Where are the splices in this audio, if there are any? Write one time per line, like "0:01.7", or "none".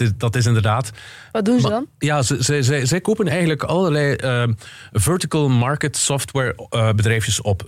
none